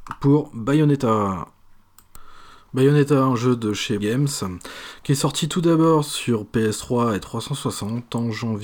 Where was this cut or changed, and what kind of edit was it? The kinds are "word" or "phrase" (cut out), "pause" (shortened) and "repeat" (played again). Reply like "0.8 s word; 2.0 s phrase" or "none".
4.0 s word

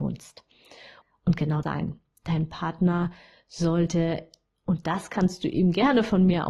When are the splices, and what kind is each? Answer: 1.6 s phrase

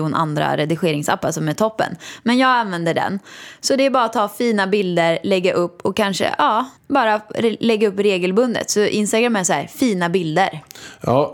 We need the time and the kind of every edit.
6.8 s pause

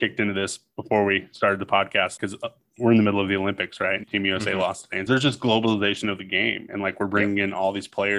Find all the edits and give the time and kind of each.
2.2 s word; 4.0 s word; 5.1 s phrase

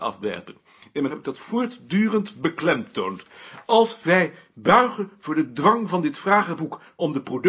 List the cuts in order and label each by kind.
1.1 s word

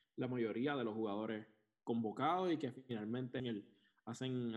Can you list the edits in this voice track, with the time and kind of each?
3.4 s word

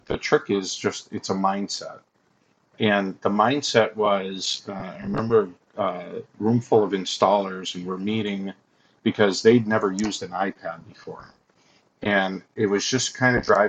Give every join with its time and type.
none

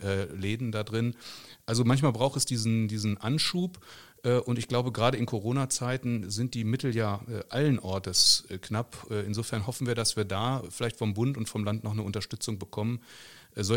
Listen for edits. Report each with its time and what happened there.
none

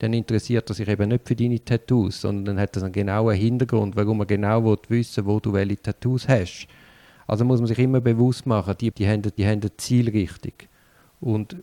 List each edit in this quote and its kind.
7.8 s word; 8.9 s word; 9.4 s repeat

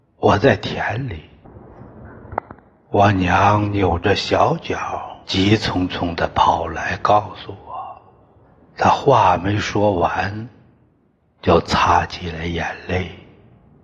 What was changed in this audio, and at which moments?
5.2 s pause; 8.4 s pause

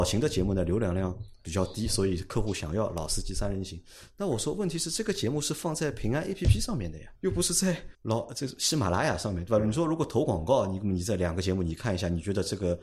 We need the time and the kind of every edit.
7.2 s word; 7.9 s pause

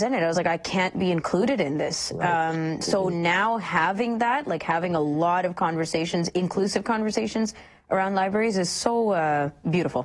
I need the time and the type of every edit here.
none

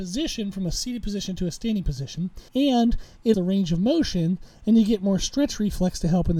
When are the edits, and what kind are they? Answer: 2.5 s pause; 3.3 s word

